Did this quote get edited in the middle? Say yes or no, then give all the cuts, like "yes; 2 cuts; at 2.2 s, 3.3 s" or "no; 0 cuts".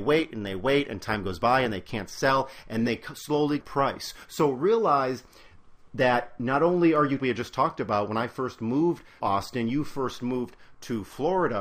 yes; 4 cuts; at 2.9 s, 3.6 s, 7.2 s, 9.2 s